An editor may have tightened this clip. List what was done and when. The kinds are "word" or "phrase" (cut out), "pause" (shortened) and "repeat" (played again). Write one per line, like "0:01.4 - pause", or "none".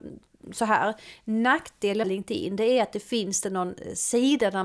0:02.0 - word
0:03.4 - word